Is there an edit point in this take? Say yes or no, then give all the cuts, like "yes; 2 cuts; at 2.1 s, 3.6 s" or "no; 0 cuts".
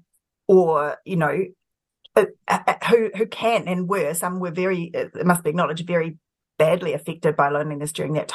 no; 0 cuts